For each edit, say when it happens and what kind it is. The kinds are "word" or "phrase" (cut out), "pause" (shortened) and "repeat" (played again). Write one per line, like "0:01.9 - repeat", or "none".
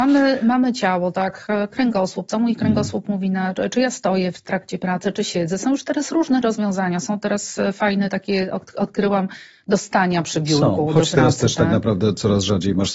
none